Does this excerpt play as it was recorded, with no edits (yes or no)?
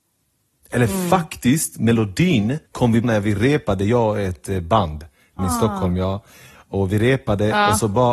no